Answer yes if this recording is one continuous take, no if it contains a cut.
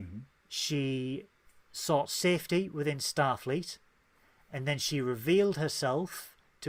yes